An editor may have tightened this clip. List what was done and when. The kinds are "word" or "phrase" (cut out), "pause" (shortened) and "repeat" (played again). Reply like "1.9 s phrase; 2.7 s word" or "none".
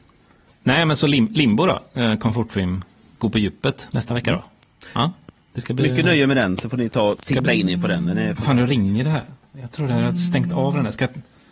none